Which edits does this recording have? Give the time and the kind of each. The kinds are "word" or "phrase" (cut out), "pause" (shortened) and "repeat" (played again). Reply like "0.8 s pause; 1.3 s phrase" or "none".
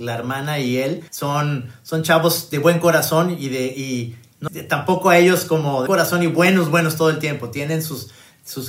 1.1 s pause; 4.5 s phrase; 5.9 s word